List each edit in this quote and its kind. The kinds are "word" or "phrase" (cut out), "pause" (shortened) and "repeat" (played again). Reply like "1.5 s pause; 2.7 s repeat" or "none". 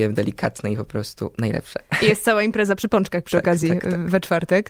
none